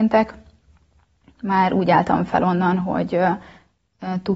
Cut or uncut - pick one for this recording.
uncut